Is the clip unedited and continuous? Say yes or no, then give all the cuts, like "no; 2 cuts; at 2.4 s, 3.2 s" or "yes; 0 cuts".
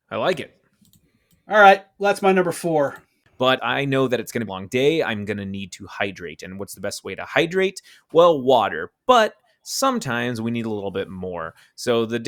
no; 2 cuts; at 3.6 s, 4.5 s